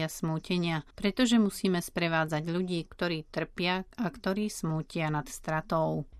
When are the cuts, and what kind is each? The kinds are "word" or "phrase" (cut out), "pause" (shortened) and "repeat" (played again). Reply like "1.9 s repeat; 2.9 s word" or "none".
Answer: 0.9 s pause